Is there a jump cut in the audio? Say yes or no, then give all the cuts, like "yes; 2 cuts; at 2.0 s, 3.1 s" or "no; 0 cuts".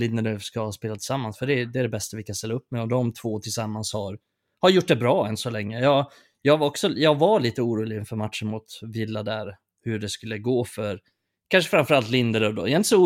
no; 0 cuts